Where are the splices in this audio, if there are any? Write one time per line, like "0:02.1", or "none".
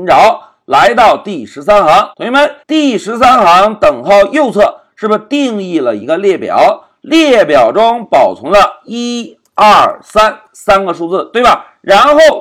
0:02.1
0:02.6